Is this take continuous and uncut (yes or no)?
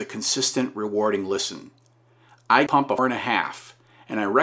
no